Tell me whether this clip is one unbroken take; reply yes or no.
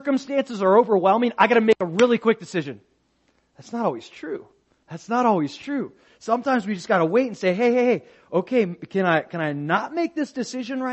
yes